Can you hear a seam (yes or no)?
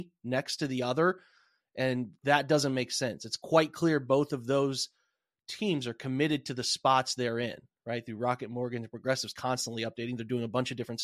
no